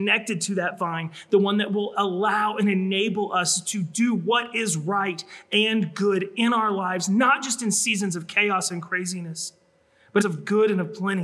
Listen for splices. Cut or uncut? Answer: cut